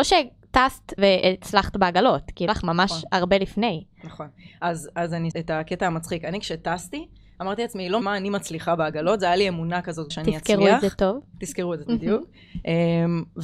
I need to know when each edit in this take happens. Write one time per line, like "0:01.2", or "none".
0:01.0
0:02.5
0:05.3
0:08.0
0:10.1
0:11.9